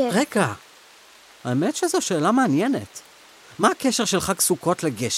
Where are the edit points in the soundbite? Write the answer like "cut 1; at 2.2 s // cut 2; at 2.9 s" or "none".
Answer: none

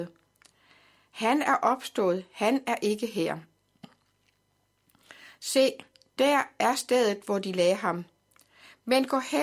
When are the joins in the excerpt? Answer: none

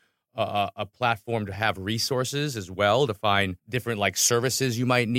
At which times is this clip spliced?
cut 1; at 3.6 s

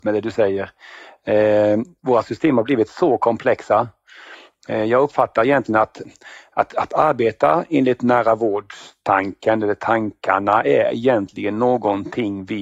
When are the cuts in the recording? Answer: none

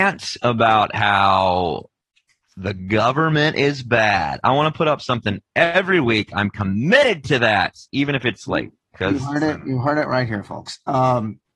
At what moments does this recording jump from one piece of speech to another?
none

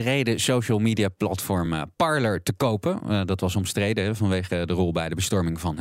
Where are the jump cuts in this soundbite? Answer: none

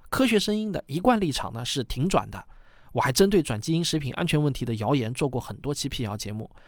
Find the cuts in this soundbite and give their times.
none

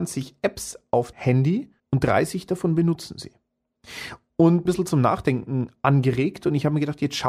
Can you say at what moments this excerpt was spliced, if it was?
cut 1; at 1.1 s // cut 2; at 1.8 s // cut 3; at 4.7 s

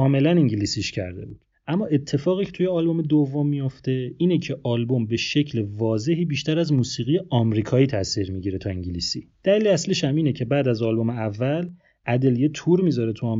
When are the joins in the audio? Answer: cut 1; at 1.5 s // cut 2; at 9.3 s

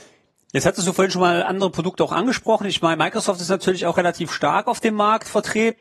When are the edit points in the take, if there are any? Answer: none

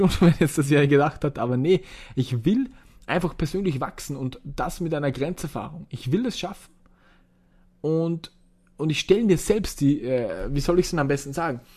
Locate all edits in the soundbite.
none

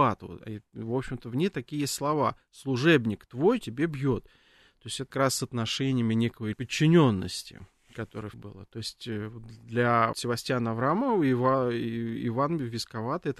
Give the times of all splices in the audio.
cut 1; at 3.6 s // cut 2; at 5.1 s // cut 3; at 6.5 s // cut 4; at 8.3 s // cut 5; at 10.1 s

